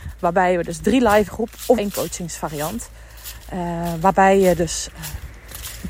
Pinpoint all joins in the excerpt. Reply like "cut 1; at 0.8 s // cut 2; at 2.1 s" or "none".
cut 1; at 1.3 s // cut 2; at 1.8 s